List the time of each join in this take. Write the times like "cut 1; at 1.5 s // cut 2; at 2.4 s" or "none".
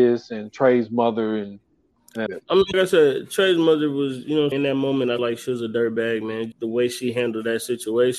cut 1; at 2.3 s // cut 2; at 2.7 s // cut 3; at 4.5 s // cut 4; at 5.2 s // cut 5; at 6.5 s